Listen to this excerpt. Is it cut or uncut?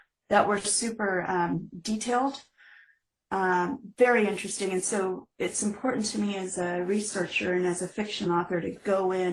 uncut